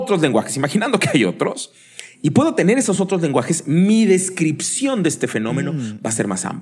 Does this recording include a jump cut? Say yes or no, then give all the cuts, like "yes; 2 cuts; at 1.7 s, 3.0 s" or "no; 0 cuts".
no; 0 cuts